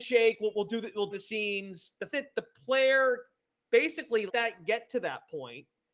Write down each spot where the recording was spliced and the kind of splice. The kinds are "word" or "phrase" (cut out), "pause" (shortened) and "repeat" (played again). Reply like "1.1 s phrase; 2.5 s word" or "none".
1.1 s phrase; 2.1 s word; 4.3 s word